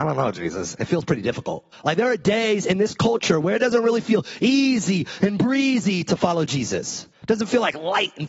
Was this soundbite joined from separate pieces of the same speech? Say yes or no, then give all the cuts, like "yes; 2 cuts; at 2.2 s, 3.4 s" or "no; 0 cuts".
yes; 2 cuts; at 1.7 s, 7.1 s